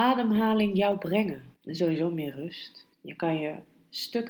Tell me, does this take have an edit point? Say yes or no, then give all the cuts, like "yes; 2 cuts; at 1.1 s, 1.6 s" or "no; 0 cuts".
yes; 2 cuts; at 1.6 s, 2.9 s